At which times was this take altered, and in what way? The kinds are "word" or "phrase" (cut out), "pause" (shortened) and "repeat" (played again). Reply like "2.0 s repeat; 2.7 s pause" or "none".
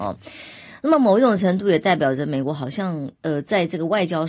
3.1 s pause